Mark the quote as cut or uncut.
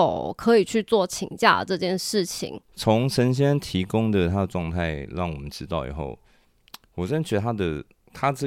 cut